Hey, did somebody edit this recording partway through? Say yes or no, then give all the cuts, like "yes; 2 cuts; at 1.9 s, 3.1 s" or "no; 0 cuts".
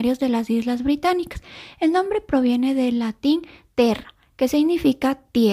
no; 0 cuts